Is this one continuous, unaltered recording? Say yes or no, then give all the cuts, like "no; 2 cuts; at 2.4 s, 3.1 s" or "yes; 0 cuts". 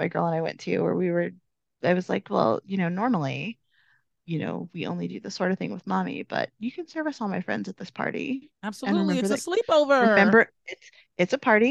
yes; 0 cuts